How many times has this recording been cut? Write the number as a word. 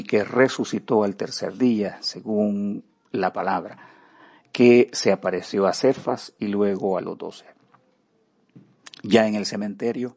zero